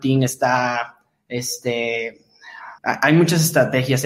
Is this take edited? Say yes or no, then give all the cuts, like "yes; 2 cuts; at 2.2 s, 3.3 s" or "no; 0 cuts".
yes; 1 cut; at 2.8 s